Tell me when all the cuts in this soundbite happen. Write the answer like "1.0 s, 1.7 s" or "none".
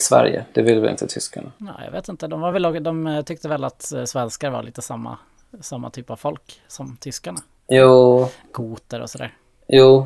none